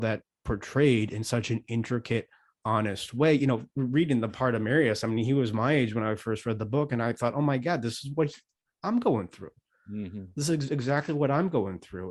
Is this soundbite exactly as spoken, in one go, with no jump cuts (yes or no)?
yes